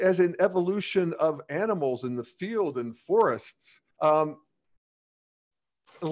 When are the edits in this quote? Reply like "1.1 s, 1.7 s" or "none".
3.9 s